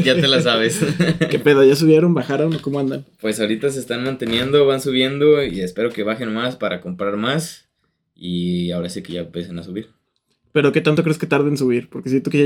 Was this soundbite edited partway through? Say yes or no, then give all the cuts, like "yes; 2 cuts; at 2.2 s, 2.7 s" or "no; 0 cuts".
no; 0 cuts